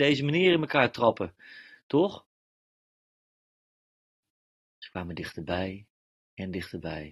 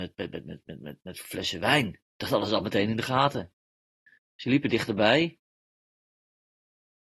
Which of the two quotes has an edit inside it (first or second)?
second